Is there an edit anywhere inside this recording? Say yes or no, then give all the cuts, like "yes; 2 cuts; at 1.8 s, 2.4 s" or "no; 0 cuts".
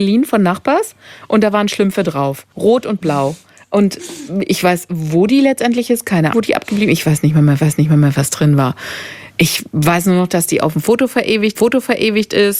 yes; 4 cuts; at 2.5 s, 6.3 s, 7.6 s, 11.6 s